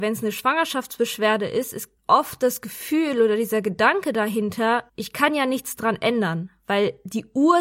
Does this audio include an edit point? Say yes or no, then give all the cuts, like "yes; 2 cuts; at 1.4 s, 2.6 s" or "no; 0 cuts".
yes; 2 cuts; at 2.0 s, 4.9 s